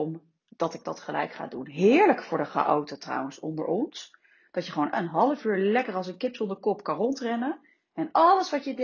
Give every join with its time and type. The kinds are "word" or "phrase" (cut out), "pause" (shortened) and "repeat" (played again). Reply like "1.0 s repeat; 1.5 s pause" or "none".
4.9 s word